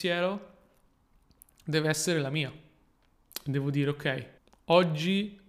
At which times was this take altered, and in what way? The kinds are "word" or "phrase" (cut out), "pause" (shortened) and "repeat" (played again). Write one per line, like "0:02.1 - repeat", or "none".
0:04.4 - pause